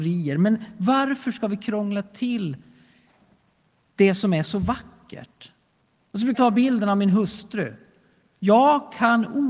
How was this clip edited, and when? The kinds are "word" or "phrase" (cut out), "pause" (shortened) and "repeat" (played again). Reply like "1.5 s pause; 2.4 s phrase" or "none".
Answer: 6.3 s word